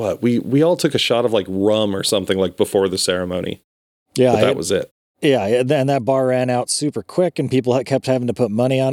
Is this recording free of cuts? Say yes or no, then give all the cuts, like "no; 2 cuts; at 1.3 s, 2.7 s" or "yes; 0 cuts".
yes; 0 cuts